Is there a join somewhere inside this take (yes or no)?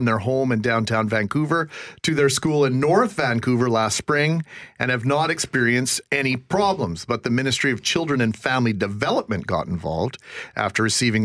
yes